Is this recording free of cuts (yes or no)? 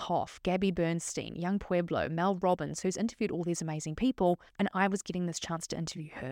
no